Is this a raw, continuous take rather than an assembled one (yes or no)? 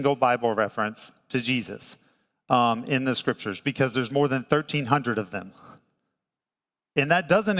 yes